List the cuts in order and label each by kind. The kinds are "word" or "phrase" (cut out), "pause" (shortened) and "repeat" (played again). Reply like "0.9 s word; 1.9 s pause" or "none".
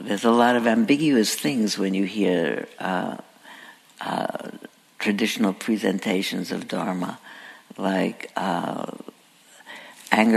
none